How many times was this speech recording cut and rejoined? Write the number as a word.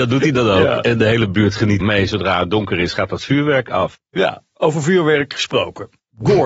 one